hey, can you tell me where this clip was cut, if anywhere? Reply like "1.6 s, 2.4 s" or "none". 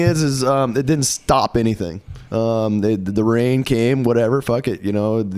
2.3 s